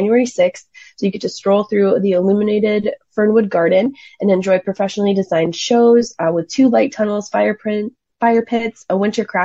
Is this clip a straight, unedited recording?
yes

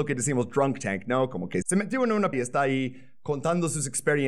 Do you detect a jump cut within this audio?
yes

